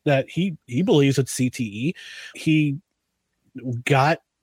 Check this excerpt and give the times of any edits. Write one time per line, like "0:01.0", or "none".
0:02.3

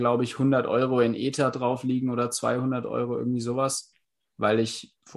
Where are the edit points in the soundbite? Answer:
none

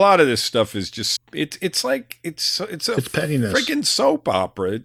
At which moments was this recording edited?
0:01.2

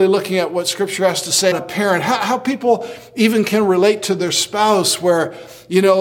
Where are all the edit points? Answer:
0:01.5

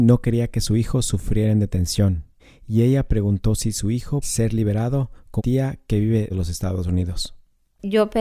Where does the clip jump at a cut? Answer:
0:02.4
0:04.2
0:05.4
0:06.3

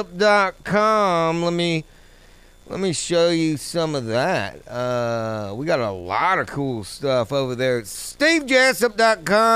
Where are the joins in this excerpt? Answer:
none

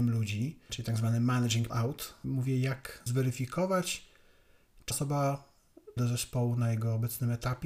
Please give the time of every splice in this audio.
0:01.7
0:02.2
0:03.1
0:04.9
0:06.0

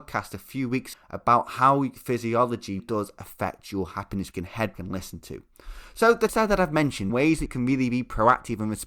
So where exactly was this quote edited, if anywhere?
0:00.9
0:02.8
0:04.3
0:04.7
0:06.3
0:07.1
0:07.5

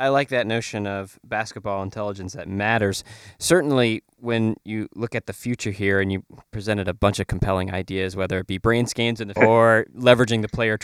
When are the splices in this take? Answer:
0:09.4

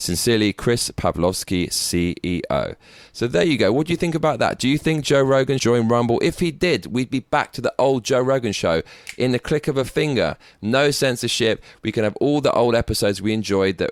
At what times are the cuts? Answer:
0:05.6

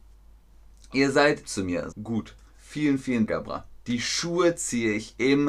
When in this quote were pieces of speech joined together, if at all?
0:01.4
0:01.9
0:03.3
0:03.8

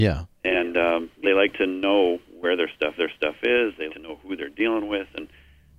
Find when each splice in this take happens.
0:01.2
0:03.0
0:03.9

